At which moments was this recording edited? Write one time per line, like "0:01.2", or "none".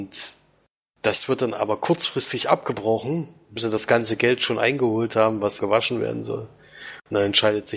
0:03.6
0:05.6